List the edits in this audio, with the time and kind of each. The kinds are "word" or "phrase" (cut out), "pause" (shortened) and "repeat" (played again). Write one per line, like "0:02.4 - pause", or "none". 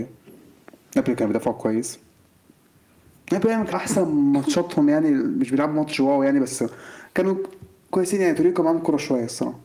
0:03.7 - word